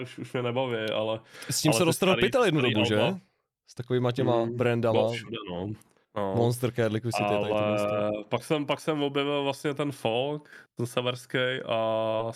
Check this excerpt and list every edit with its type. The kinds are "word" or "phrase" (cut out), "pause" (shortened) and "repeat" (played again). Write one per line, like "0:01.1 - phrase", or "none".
0:10.8 - word